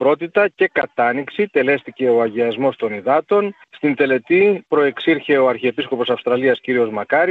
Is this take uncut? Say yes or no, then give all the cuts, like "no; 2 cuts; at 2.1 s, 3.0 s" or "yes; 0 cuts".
no; 1 cut; at 3.6 s